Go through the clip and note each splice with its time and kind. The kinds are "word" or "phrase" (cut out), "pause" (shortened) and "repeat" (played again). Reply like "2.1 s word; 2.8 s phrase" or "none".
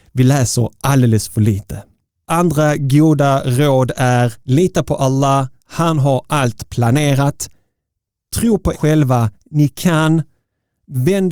4.4 s pause; 8.7 s word